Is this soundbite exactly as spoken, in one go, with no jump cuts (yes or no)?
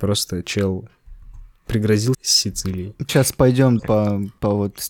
no